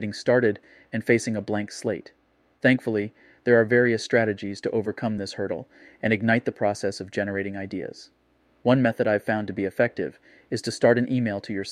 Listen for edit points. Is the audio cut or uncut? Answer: uncut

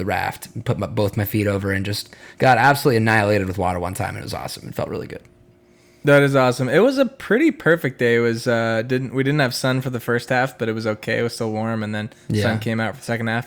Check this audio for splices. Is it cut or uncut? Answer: uncut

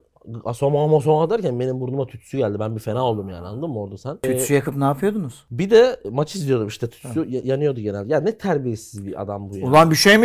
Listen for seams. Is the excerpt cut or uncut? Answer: uncut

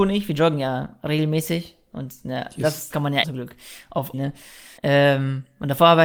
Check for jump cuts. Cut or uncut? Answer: cut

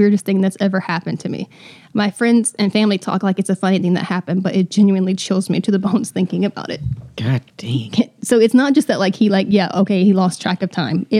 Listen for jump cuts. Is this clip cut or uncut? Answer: uncut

